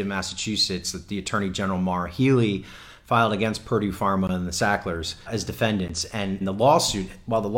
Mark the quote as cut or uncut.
cut